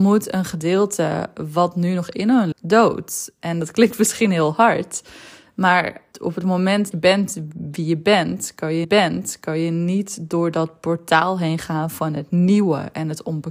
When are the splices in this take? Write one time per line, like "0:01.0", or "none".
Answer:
0:02.5
0:06.1
0:06.9
0:08.8